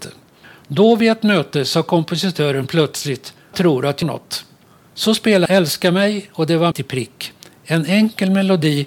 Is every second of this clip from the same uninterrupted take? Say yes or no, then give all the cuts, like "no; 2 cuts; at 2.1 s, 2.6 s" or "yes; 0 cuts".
no; 4 cuts; at 3.5 s, 4.0 s, 5.5 s, 6.7 s